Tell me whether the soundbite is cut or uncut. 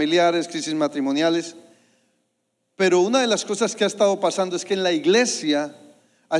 uncut